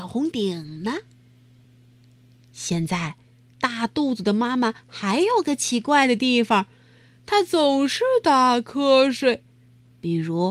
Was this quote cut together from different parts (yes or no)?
no